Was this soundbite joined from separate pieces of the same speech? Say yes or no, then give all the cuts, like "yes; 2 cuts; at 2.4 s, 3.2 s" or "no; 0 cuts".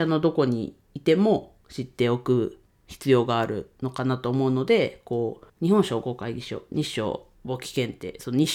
yes; 4 cuts; at 1.6 s, 2.7 s, 5.5 s, 7.3 s